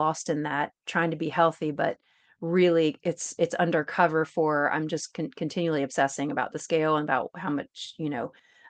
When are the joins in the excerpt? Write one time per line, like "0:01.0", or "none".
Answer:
none